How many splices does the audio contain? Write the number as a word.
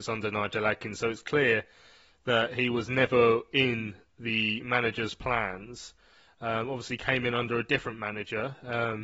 zero